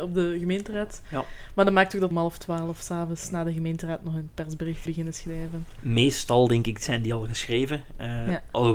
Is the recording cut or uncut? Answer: cut